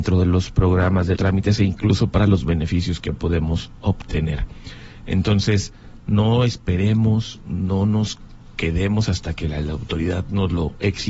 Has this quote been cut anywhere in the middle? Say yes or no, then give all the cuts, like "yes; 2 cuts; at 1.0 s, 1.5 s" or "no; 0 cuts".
yes; 1 cut; at 1.2 s